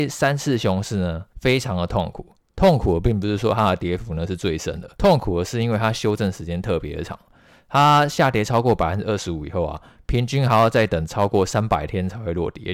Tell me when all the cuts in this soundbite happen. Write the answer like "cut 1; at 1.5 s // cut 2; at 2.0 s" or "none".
cut 1; at 1.3 s // cut 2; at 4.9 s